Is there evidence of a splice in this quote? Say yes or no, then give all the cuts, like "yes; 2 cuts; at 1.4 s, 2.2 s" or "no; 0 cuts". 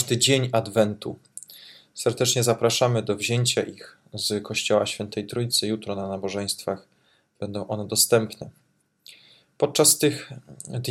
no; 0 cuts